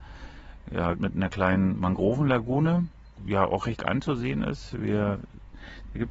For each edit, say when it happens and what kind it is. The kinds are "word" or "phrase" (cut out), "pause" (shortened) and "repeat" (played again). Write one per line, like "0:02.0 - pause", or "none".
0:00.9 - word
0:03.2 - word
0:03.8 - word